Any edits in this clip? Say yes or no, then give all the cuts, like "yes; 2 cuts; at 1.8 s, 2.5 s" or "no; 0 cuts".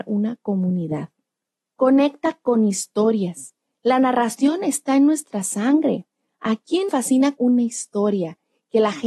yes; 2 cuts; at 6.9 s, 7.4 s